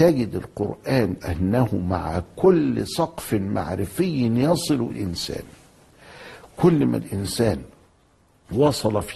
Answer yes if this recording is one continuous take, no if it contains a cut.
no